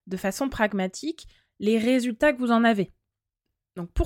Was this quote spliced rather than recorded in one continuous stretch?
no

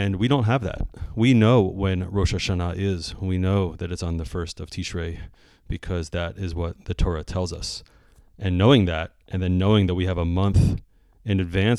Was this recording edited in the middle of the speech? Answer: no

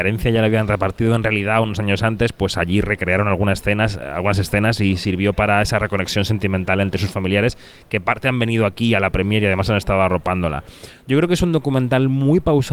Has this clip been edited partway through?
no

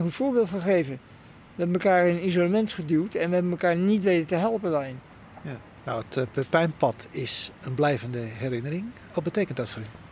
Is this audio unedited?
yes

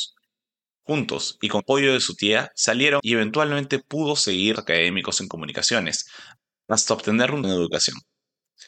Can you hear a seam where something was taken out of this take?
yes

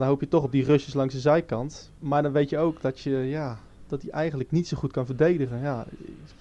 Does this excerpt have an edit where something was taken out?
yes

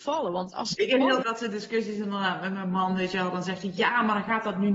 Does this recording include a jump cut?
yes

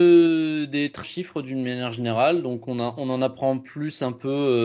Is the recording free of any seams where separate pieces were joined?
no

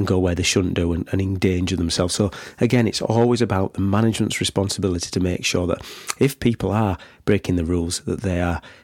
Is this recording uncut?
yes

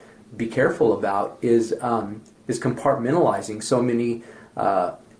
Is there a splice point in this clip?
no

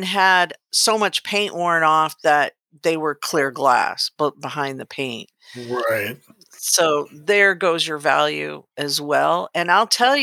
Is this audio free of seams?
yes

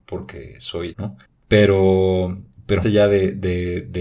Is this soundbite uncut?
no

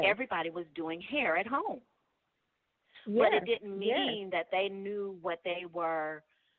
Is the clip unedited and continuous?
yes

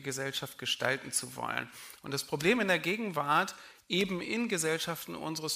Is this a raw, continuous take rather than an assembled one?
yes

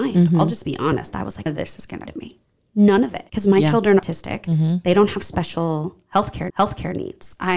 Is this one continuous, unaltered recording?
no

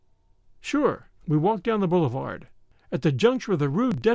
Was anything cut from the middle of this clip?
yes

